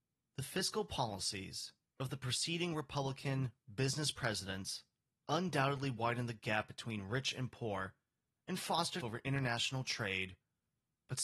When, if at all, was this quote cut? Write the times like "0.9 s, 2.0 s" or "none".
9.0 s